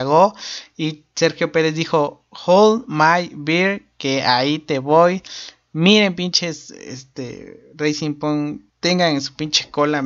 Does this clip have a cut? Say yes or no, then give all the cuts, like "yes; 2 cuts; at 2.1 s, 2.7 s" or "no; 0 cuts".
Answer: yes; 1 cut; at 8.7 s